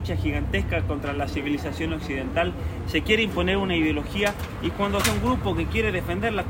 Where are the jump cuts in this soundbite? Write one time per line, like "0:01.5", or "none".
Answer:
0:05.0